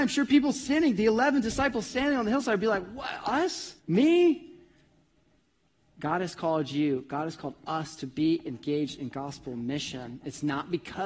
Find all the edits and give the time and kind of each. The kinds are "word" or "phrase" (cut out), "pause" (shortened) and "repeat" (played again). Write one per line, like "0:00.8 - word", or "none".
0:03.8 - pause